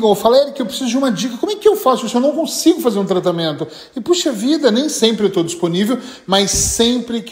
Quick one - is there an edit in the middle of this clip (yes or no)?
no